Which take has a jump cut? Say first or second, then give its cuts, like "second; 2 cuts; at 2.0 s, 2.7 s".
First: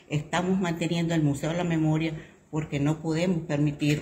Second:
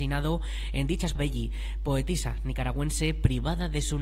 second; 1 cut; at 1.2 s